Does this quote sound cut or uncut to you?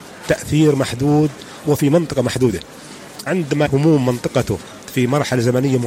cut